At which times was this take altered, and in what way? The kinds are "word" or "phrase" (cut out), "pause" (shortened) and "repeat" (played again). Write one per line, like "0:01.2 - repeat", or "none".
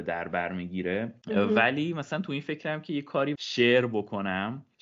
0:03.4 - word